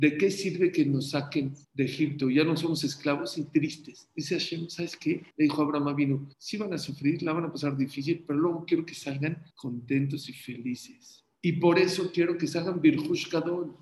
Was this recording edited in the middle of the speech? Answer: yes; 5 cuts; at 1.6 s, 5.3 s, 6.3 s, 9.5 s, 11.3 s

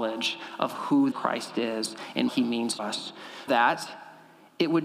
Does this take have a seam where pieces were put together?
yes; 4 cuts; at 1.1 s, 2.3 s, 2.8 s, 3.5 s

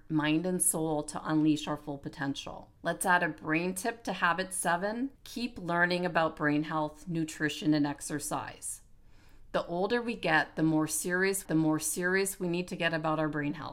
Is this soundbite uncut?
no; 3 cuts; at 2.8 s, 5.2 s, 11.5 s

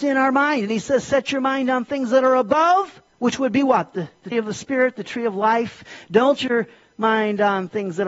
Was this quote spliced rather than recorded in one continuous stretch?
yes; 3 cuts; at 3.1 s, 4.3 s, 6.4 s

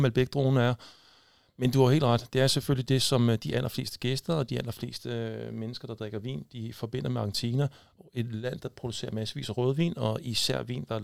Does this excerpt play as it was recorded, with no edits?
yes; 0 cuts

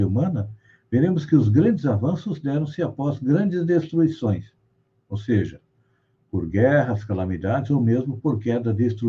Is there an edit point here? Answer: no; 0 cuts

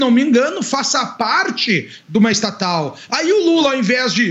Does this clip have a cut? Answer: no; 0 cuts

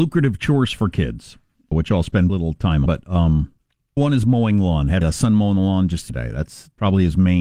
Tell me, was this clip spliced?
yes; 6 cuts; at 1.7 s, 2.3 s, 2.9 s, 4.0 s, 5.0 s, 6.1 s

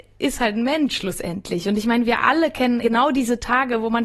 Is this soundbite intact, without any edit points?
no; 1 cut; at 2.8 s

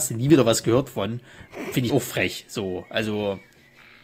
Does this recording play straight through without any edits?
no; 1 cut; at 1.9 s

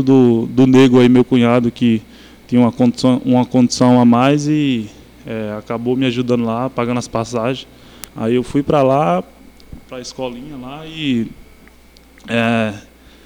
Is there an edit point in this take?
yes; 1 cut; at 8.1 s

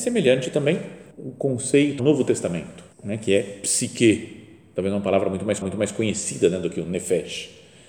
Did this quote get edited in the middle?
yes; 4 cuts; at 1.1 s, 2.0 s, 2.9 s, 5.6 s

